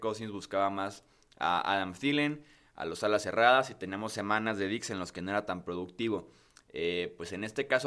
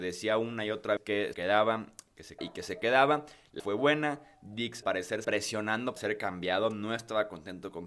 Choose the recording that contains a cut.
second; 7 cuts; at 1.0 s, 1.3 s, 2.4 s, 3.6 s, 4.8 s, 5.2 s, 6.0 s

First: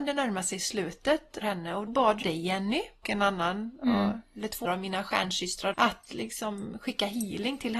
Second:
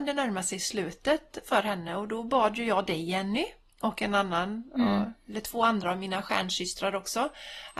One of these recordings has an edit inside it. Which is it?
first; 6 cuts; at 1.4 s, 1.9 s, 2.2 s, 3.0 s, 4.7 s, 5.7 s

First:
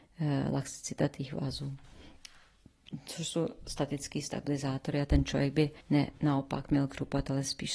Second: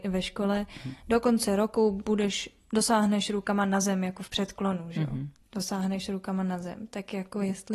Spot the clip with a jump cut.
first; 1 cut; at 5.8 s

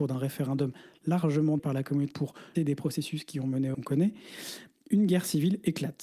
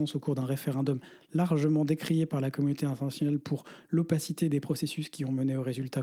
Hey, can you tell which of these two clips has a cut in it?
first; 4 cuts; at 1.6 s, 2.1 s, 2.6 s, 3.7 s

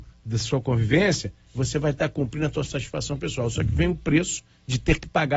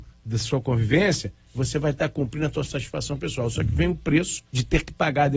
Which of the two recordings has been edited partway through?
second; 1 cut; at 4.5 s

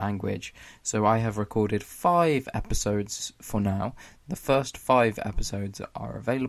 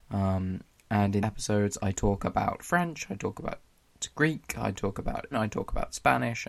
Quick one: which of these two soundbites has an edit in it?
second; 2 cuts; at 1.2 s, 5.3 s

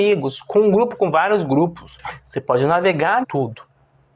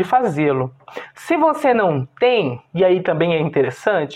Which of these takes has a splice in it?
first; 1 cut; at 3.2 s

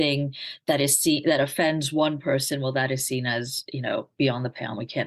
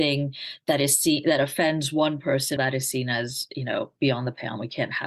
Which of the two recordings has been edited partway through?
second; 1 cut; at 2.6 s

